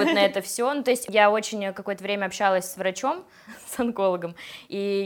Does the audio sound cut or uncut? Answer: uncut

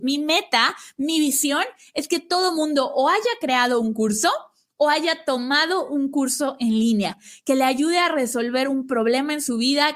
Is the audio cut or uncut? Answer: uncut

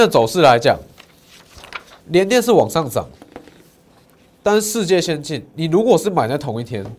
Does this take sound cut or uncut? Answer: cut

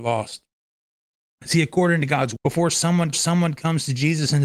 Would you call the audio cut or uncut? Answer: cut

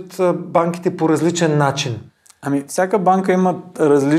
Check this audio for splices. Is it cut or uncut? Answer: uncut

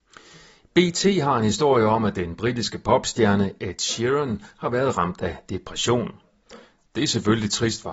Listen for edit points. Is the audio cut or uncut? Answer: uncut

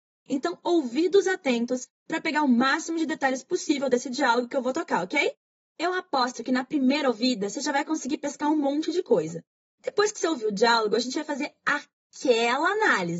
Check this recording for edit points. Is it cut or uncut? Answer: uncut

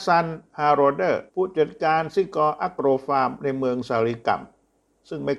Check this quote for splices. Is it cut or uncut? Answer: cut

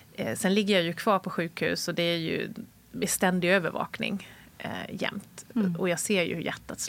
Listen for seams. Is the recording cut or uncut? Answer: uncut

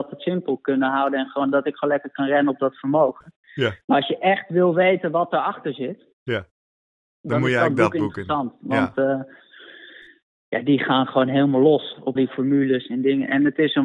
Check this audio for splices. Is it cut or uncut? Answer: cut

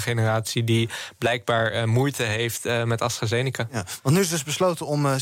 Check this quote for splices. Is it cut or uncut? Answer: uncut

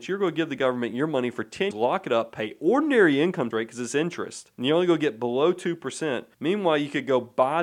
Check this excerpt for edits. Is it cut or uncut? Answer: cut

